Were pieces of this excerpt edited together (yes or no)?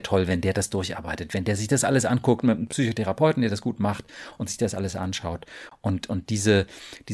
no